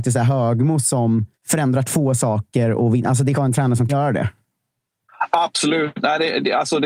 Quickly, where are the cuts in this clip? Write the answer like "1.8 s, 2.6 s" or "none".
1.3 s, 3.3 s, 3.9 s